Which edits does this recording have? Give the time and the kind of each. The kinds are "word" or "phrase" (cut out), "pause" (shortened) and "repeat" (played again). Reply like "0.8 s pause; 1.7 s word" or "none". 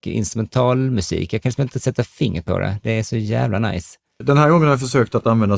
none